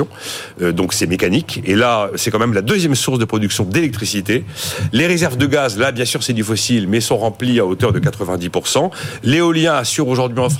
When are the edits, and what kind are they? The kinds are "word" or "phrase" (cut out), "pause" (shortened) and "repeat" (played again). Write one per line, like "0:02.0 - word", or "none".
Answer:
none

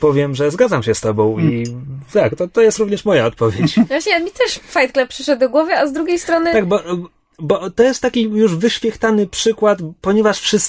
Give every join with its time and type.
none

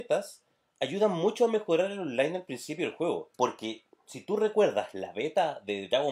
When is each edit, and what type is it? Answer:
0:03.3 - pause

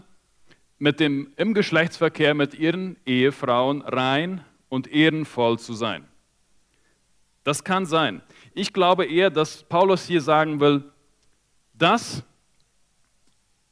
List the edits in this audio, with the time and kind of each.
none

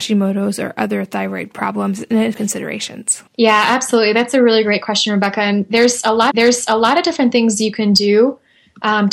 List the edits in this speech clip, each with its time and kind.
0:02.3 - phrase
0:03.3 - pause
0:06.3 - repeat

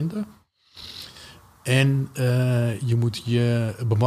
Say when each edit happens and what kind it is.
none

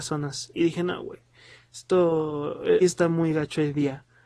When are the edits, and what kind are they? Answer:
0:02.8 - word

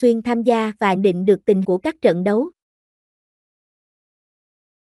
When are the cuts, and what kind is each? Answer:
0:01.0 - word
0:01.6 - word

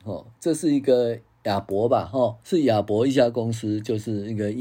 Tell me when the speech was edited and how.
0:02.4 - pause

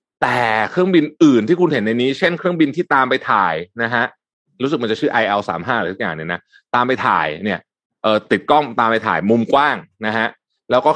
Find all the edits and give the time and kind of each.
none

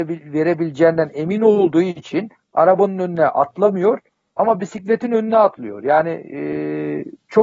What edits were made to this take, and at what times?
none

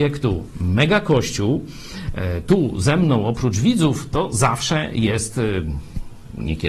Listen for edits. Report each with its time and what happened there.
none

